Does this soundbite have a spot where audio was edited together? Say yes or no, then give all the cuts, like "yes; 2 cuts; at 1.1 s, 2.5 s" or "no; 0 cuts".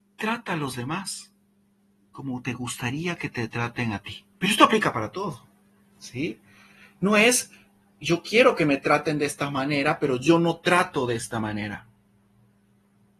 yes; 1 cut; at 4.3 s